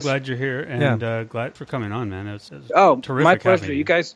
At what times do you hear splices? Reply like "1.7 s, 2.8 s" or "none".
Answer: 1.6 s, 2.5 s

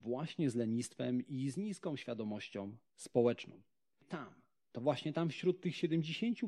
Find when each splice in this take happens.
4.0 s

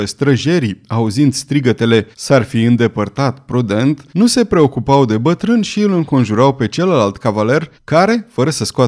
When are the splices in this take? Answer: 2.1 s, 4.1 s, 7.7 s

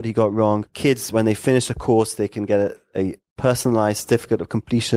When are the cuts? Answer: none

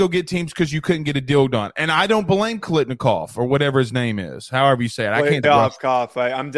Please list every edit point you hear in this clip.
5.4 s

